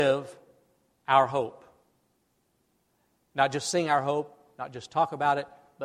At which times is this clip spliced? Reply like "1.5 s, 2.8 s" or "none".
none